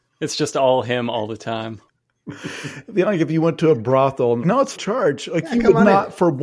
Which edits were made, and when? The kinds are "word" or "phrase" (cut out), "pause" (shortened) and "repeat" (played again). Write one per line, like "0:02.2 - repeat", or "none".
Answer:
0:01.9 - pause
0:04.4 - phrase
0:04.7 - phrase